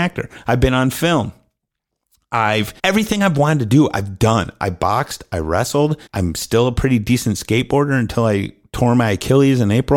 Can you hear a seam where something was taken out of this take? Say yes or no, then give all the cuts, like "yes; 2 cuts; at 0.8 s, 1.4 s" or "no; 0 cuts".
yes; 2 cuts; at 2.8 s, 6.1 s